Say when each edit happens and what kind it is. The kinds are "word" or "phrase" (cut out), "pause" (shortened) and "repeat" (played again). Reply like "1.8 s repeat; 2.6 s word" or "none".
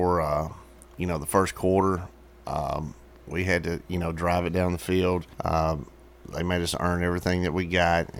3.1 s pause; 5.3 s pause